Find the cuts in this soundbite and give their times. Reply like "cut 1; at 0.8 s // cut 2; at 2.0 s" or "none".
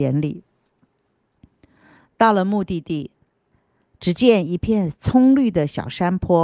none